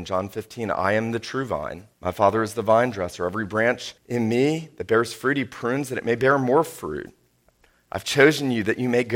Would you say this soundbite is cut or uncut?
cut